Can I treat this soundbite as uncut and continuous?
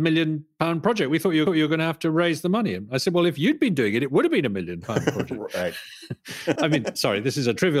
no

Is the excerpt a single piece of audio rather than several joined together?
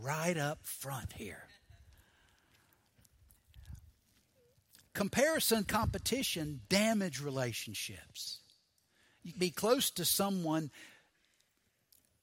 no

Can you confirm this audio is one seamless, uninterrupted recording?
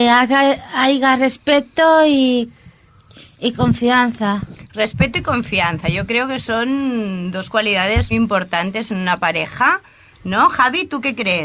no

